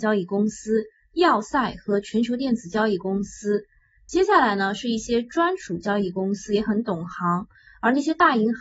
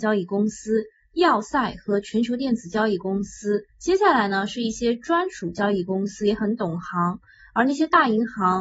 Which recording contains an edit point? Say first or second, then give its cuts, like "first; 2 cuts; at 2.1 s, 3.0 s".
second; 1 cut; at 3.7 s